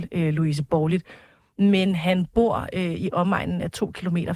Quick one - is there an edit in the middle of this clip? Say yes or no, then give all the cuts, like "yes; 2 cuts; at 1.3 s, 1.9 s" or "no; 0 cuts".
no; 0 cuts